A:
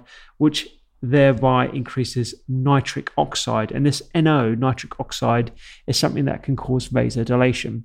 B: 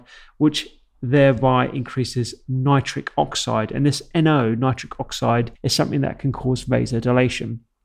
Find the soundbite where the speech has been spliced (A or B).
B